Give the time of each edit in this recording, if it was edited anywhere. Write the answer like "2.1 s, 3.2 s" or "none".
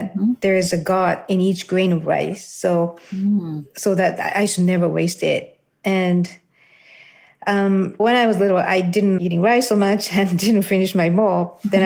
8.0 s, 9.2 s